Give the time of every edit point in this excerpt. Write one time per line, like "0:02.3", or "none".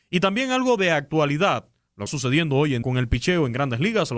0:02.1
0:02.8